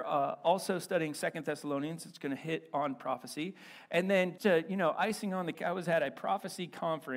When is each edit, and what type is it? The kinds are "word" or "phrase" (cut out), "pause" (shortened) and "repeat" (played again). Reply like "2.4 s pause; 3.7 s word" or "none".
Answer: 4.4 s word; 5.5 s word